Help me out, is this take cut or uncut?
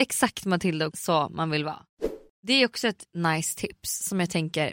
cut